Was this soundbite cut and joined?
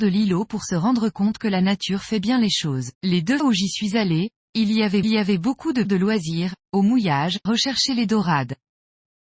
yes; 5 cuts; at 2.9 s, 3.4 s, 5.0 s, 5.8 s, 7.5 s

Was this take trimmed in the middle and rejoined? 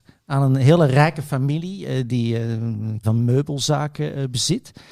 yes; 1 cut; at 3.0 s

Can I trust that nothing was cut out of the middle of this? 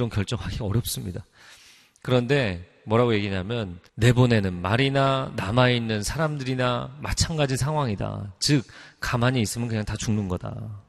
no; 1 cut; at 3.9 s

